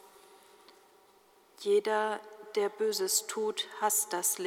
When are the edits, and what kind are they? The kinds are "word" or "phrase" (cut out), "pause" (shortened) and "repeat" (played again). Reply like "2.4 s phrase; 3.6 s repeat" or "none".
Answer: none